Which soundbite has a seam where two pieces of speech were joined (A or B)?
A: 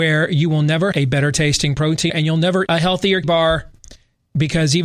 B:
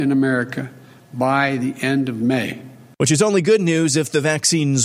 A